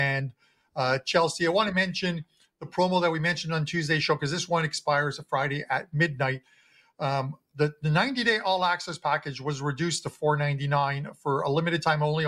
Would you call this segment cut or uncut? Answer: uncut